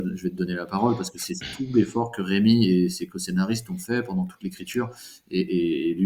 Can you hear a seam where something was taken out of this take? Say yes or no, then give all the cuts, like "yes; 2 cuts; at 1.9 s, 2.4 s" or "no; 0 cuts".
no; 0 cuts